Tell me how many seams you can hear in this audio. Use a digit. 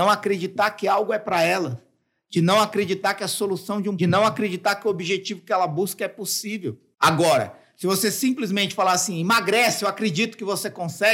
1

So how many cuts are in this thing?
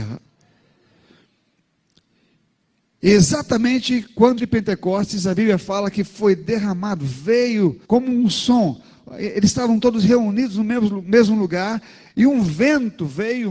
2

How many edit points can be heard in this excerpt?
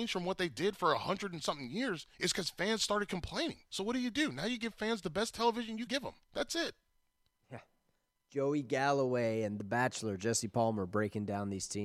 5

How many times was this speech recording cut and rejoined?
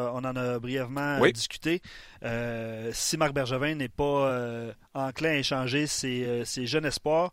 0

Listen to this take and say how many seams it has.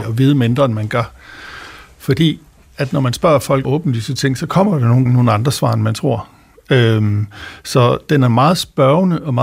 2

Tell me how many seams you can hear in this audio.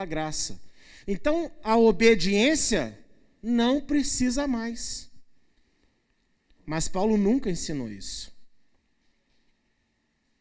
0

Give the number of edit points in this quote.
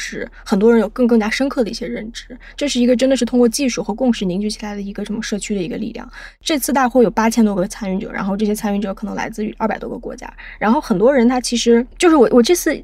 1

